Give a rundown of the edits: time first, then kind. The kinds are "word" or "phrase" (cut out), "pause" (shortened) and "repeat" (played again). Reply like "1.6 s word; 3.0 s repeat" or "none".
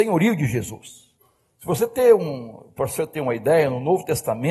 none